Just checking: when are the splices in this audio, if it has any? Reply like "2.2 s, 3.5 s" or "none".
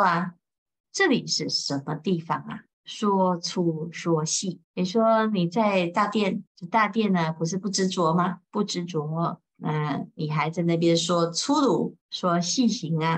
2.7 s, 4.6 s, 6.5 s, 8.4 s, 12.0 s